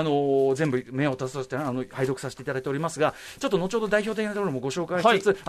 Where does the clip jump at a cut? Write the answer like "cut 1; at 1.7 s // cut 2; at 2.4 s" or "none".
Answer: none